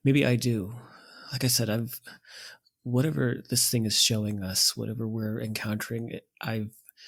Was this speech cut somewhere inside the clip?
no; 0 cuts

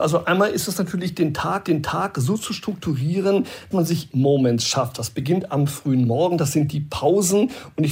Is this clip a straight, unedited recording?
no; 3 cuts; at 1.6 s, 3.7 s, 4.1 s

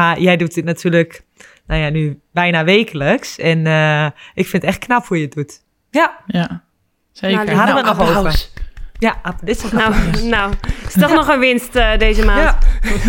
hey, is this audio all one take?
yes; 0 cuts

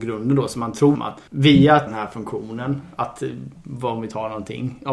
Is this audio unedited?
no; 3 cuts; at 0.9 s, 1.3 s, 1.9 s

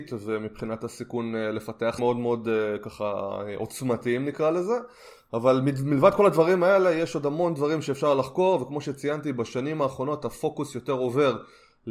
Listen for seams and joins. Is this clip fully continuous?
no; 1 cut; at 2.0 s

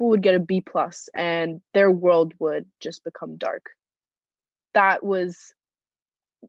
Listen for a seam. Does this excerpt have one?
no; 0 cuts

